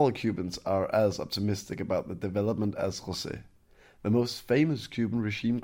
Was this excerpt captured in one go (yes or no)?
yes